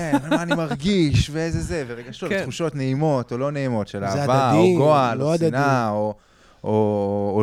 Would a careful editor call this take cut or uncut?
uncut